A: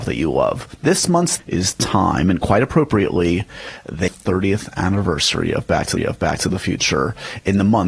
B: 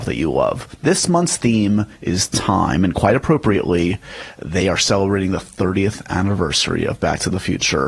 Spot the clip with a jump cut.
A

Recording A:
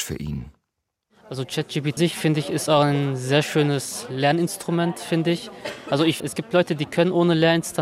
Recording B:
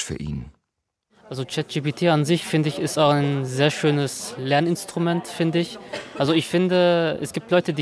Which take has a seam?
A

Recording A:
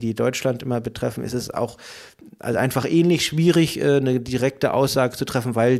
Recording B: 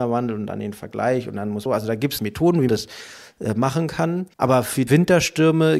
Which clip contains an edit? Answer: B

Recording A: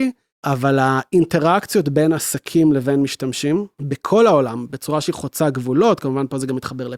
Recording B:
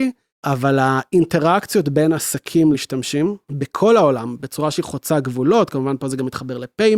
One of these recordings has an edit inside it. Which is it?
B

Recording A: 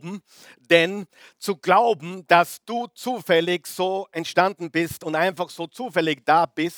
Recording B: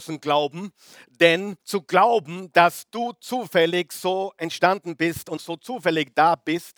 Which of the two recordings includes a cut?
B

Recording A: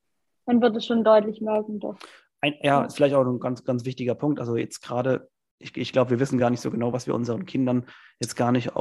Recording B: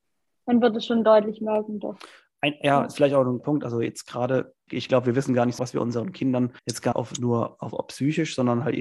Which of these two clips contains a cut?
B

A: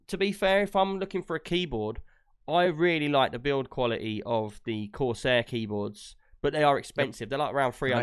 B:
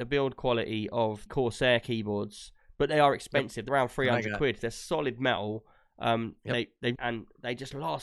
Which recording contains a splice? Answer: B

